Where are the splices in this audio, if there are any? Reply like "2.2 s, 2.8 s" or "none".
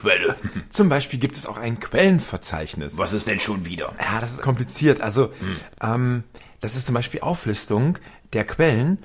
3.3 s, 4.4 s, 7.2 s